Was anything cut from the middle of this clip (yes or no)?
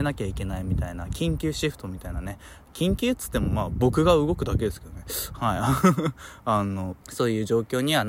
yes